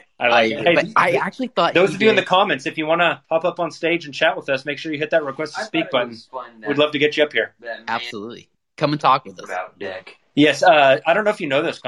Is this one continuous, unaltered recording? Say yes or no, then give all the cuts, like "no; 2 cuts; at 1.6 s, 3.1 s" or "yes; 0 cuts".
no; 2 cuts; at 3.2 s, 8.5 s